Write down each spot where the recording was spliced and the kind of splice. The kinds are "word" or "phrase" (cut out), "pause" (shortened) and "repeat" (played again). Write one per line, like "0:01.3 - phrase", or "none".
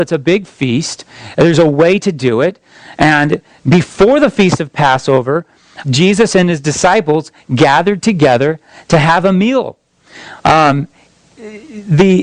0:05.8 - word